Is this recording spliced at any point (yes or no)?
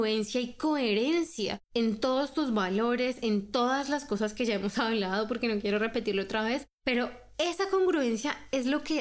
yes